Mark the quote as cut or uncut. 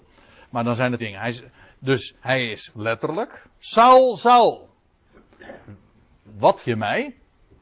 cut